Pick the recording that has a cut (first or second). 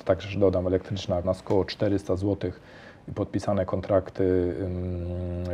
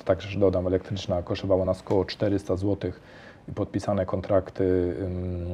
first